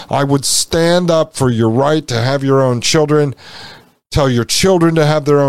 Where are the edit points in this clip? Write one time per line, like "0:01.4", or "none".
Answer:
none